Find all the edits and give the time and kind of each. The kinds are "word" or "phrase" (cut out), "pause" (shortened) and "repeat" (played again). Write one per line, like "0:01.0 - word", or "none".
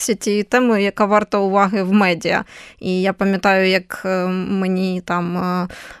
none